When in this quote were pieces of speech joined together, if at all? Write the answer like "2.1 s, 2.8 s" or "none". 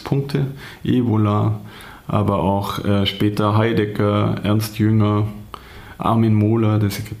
none